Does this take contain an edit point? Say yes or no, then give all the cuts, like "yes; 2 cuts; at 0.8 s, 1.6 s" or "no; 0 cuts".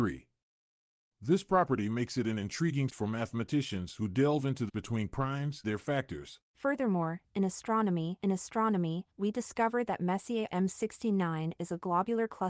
yes; 6 cuts; at 2.9 s, 4.7 s, 5.6 s, 6.4 s, 8.2 s, 10.5 s